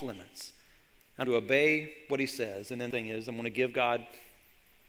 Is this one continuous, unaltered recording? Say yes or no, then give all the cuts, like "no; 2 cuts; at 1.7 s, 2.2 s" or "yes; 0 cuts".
no; 2 cuts; at 1.2 s, 2.9 s